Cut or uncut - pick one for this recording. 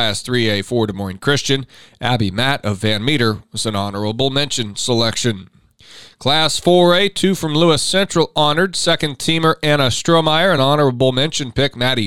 uncut